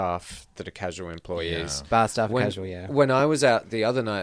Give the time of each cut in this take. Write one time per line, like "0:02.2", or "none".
none